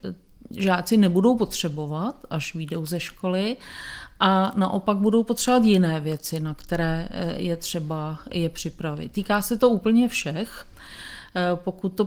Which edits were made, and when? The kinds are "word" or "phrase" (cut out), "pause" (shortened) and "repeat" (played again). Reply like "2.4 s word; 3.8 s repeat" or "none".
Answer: none